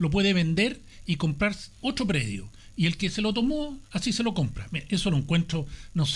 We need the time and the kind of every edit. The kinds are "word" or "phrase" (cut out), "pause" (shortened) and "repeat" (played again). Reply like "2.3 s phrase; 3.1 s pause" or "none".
1.7 s pause; 3.9 s pause